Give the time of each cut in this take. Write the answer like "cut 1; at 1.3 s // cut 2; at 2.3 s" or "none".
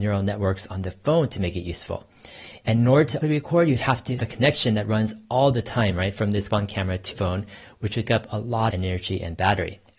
cut 1; at 3.2 s // cut 2; at 4.2 s // cut 3; at 6.5 s // cut 4; at 7.1 s // cut 5; at 8.1 s // cut 6; at 8.7 s